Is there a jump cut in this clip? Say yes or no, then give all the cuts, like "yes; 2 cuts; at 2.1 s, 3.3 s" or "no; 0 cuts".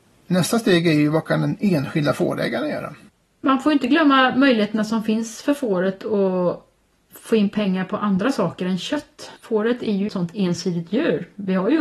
yes; 2 cuts; at 9.4 s, 10.1 s